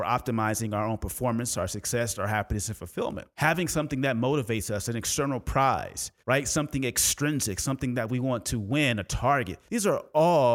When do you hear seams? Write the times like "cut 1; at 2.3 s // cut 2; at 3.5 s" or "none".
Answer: cut 1; at 3.3 s // cut 2; at 6.2 s // cut 3; at 9.7 s